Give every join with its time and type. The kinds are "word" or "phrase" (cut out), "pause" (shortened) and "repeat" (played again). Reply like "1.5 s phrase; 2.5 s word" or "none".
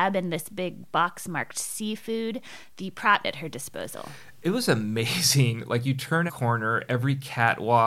3.2 s phrase; 6.3 s word